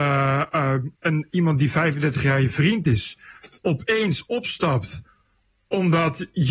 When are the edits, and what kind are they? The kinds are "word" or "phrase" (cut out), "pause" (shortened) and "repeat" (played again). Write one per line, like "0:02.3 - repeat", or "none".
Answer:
none